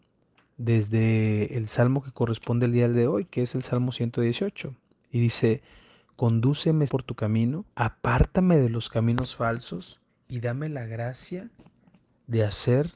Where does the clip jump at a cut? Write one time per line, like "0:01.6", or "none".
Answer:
0:06.9
0:07.7
0:10.1